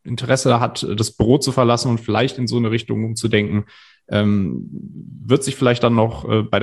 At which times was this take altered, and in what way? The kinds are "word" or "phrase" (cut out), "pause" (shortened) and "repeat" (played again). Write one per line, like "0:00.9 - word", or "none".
none